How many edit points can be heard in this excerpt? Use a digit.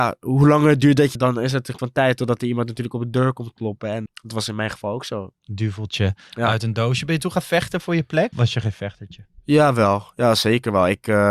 5